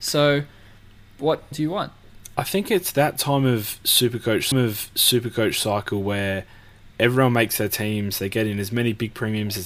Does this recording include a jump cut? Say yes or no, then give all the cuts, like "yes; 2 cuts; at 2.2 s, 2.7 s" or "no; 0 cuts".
yes; 2 cuts; at 1.5 s, 4.5 s